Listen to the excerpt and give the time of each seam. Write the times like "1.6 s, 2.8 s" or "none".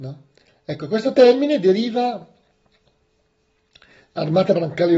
none